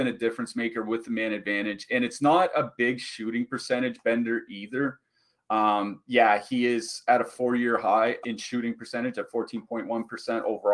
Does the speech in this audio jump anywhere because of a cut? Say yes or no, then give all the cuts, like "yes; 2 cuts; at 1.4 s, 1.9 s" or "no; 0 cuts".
yes; 1 cut; at 8.2 s